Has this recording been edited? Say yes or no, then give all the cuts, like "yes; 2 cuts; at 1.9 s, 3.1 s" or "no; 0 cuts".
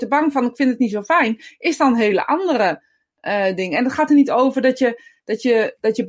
no; 0 cuts